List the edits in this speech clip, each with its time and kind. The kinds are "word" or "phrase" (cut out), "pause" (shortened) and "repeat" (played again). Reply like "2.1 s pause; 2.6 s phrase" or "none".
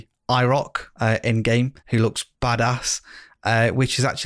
0.9 s pause; 1.8 s pause; 2.3 s pause